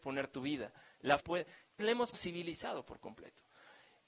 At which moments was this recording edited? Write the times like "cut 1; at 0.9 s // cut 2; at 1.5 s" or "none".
cut 1; at 1.2 s // cut 2; at 1.8 s // cut 3; at 2.1 s